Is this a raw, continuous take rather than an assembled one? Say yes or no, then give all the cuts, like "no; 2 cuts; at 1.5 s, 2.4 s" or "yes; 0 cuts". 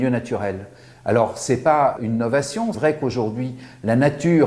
no; 2 cuts; at 2.0 s, 2.7 s